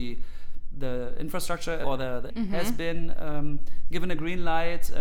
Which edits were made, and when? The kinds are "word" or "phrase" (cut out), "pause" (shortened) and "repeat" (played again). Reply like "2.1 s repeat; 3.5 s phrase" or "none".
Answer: 1.8 s word; 2.3 s word